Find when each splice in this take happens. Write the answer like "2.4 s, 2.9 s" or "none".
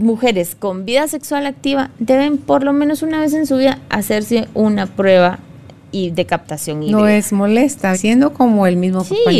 7.9 s